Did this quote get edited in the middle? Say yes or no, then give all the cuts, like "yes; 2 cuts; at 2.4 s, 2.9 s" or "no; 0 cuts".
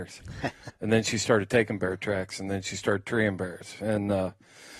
no; 0 cuts